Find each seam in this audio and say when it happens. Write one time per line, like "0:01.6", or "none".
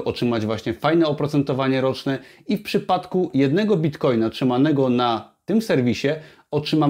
none